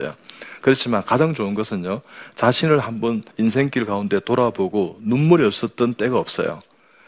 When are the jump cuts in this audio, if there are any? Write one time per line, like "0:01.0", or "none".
0:03.3